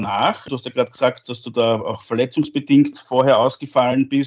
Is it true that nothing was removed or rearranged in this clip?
yes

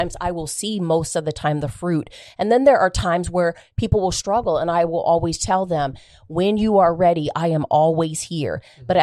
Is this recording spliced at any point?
no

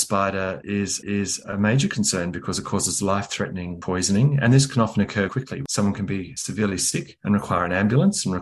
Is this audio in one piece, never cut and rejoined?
no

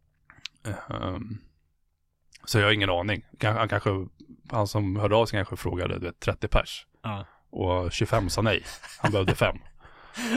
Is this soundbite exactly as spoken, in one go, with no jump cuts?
yes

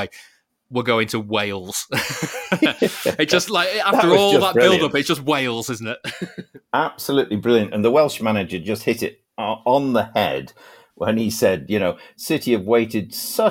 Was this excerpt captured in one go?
yes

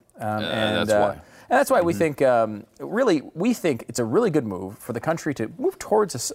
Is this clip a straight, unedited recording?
yes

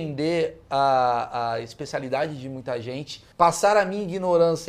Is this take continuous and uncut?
no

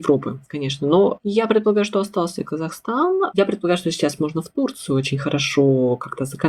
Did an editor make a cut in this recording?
no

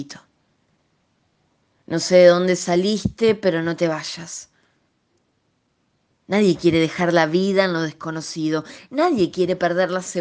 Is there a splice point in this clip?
no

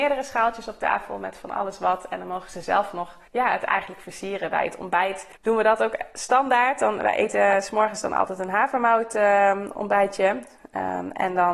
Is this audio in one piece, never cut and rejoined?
no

